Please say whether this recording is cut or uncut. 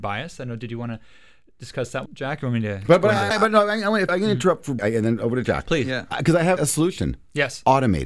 cut